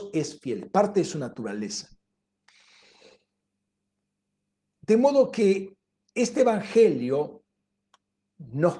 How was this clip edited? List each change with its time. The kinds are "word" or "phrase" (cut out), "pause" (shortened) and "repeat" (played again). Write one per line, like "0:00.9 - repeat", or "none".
none